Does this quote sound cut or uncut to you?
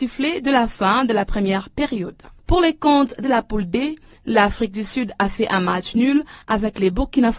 uncut